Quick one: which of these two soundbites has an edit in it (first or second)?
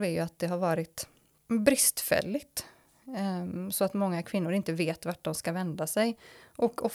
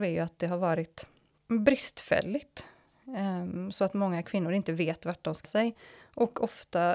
second